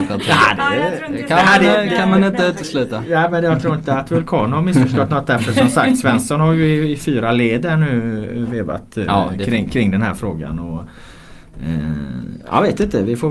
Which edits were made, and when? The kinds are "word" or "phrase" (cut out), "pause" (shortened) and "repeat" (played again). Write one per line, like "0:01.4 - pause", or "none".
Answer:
none